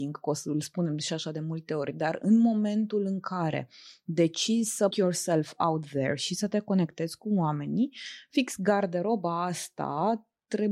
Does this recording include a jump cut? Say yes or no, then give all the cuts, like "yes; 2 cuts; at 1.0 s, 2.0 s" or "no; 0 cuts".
yes; 1 cut; at 4.9 s